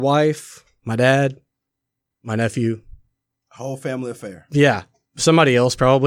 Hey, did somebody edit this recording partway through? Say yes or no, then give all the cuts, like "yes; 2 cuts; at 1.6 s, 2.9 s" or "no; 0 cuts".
no; 0 cuts